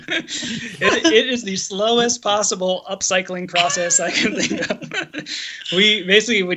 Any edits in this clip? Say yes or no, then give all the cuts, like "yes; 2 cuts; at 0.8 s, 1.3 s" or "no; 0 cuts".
no; 0 cuts